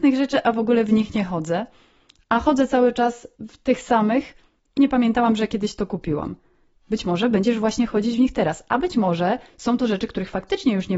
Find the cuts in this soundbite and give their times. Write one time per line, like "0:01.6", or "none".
0:03.3
0:04.8

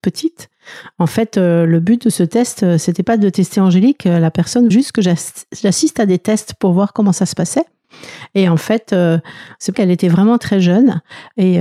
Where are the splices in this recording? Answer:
0:04.7
0:09.7
0:10.4

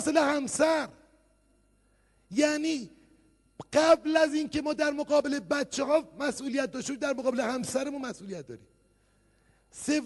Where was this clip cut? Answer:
none

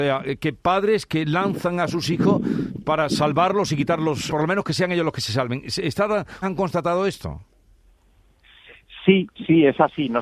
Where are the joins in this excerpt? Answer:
0:04.3
0:06.4

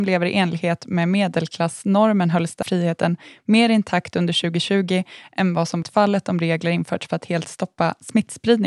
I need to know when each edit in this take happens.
0:02.6
0:05.8

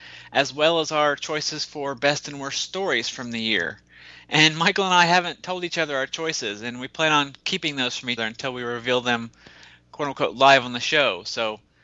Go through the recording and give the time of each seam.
0:08.2

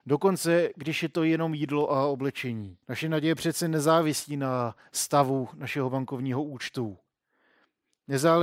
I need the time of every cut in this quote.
0:02.8

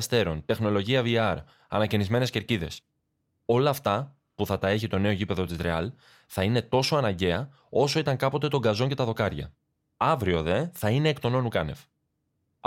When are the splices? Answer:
none

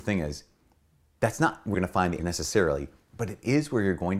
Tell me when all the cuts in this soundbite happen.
0:01.7
0:02.2

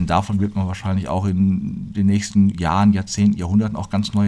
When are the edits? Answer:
none

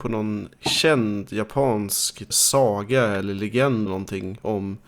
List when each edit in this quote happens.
0:02.3
0:03.9

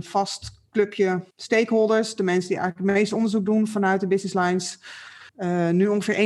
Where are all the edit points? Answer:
0:01.3
0:05.3

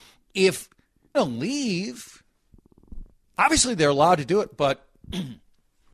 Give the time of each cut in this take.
0:01.1
0:03.2

